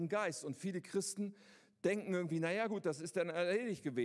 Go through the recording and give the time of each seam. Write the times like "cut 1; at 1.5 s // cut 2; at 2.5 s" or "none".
none